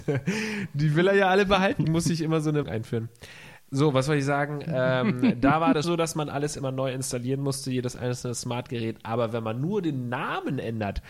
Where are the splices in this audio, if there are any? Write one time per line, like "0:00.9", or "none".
0:01.8
0:02.6
0:05.8

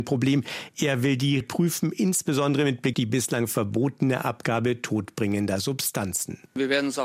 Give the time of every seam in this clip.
0:01.4
0:02.9

